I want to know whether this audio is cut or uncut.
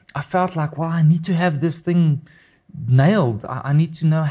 uncut